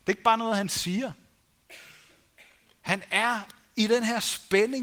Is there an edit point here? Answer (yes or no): no